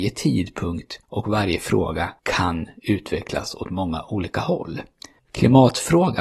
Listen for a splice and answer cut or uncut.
cut